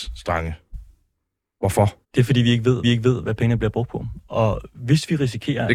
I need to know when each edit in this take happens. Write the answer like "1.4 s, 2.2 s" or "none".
2.0 s, 2.8 s